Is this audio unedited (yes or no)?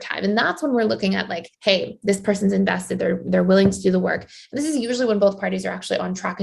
no